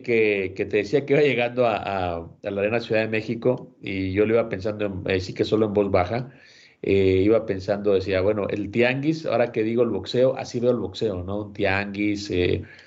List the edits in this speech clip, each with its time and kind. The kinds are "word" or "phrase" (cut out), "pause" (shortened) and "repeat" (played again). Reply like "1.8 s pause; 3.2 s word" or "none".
none